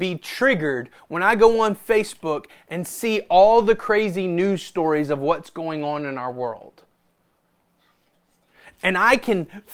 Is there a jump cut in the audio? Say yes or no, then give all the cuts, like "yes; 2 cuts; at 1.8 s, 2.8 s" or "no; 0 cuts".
no; 0 cuts